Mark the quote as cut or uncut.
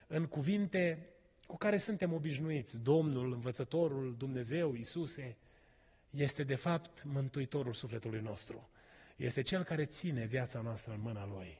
uncut